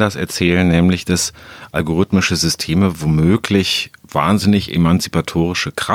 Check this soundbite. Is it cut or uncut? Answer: uncut